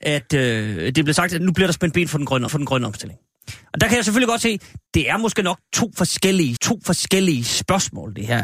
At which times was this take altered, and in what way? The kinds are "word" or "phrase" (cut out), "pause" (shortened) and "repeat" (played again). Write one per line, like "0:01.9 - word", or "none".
0:01.4 - word
0:02.5 - repeat
0:04.9 - pause
0:06.6 - repeat